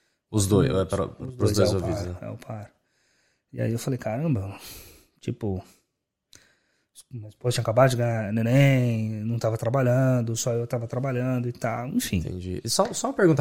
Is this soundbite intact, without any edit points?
yes; 0 cuts

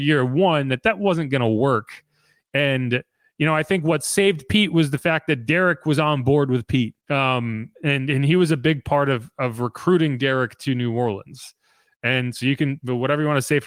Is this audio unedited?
no; 1 cut; at 7.0 s

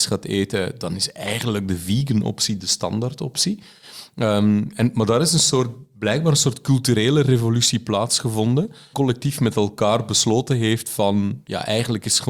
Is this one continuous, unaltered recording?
no; 1 cut; at 8.9 s

